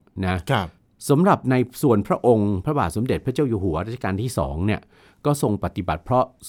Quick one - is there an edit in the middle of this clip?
no; 0 cuts

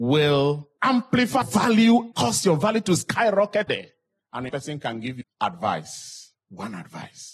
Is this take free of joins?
no; 5 cuts; at 1.4 s, 2.1 s, 3.7 s, 4.5 s, 5.2 s

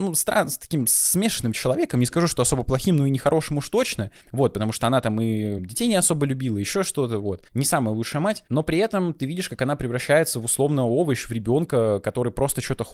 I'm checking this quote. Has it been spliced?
yes; 4 cuts; at 4.2 s, 5.6 s, 7.5 s, 8.5 s

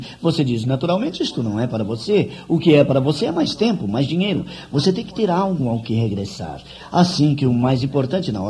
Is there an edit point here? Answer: no; 0 cuts

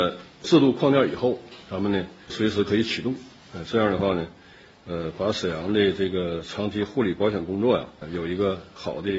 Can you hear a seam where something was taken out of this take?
no; 0 cuts

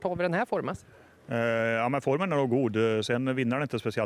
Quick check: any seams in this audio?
no; 0 cuts

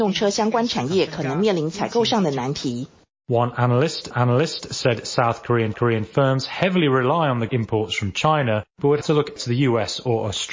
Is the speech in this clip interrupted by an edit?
yes; 6 cuts; at 4.1 s, 5.7 s, 7.5 s, 8.7 s, 9.0 s, 9.4 s

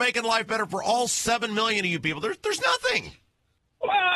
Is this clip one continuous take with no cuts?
yes; 0 cuts

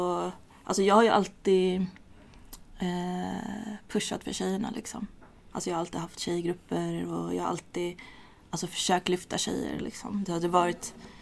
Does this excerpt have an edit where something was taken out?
no; 0 cuts

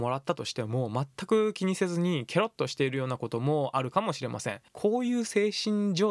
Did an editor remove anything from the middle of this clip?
yes; 1 cut; at 4.7 s

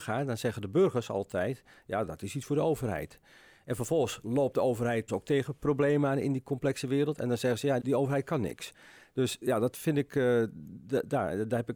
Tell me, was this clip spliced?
yes; 3 cuts; at 5.1 s, 7.8 s, 9.4 s

